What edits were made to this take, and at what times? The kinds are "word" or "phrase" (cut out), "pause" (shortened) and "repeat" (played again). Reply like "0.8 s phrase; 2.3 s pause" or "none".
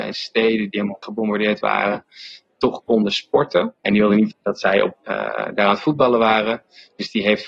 1.0 s word; 3.8 s pause; 4.3 s word; 4.9 s phrase